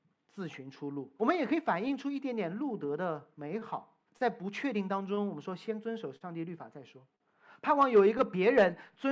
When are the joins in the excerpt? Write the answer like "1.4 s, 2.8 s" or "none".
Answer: 1.2 s, 3.3 s, 4.1 s